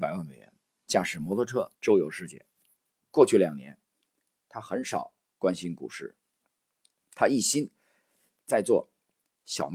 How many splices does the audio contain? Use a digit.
1